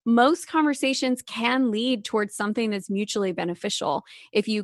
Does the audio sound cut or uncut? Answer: uncut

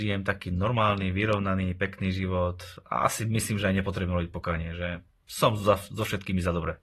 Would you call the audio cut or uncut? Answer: uncut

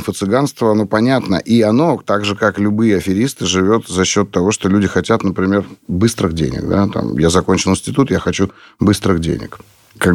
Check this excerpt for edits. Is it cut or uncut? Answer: uncut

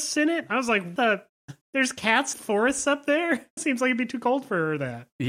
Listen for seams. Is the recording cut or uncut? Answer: cut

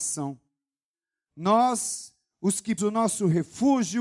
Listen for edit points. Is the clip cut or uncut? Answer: cut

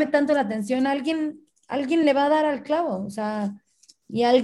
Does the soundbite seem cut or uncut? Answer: uncut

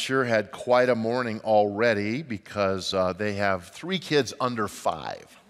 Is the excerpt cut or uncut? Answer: uncut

